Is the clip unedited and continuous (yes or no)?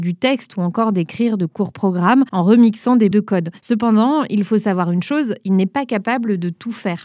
no